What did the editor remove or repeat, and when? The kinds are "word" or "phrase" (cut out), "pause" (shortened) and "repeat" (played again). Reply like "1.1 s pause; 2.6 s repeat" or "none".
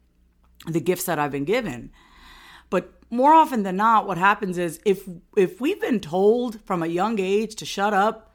none